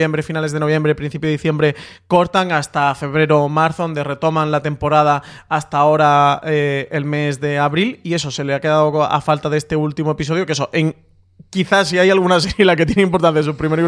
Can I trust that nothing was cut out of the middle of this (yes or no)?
yes